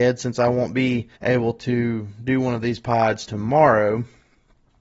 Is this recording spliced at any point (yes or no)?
yes